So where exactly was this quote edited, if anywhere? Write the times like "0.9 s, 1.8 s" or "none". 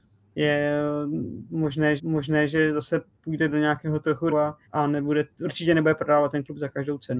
2.0 s, 4.3 s, 4.7 s